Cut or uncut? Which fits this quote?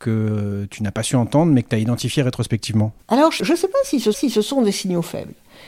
cut